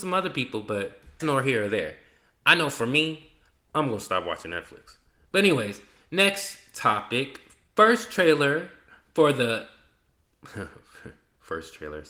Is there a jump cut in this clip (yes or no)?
yes